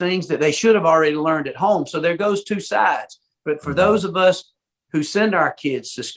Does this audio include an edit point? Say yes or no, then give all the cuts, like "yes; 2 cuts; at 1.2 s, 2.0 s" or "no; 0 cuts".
no; 0 cuts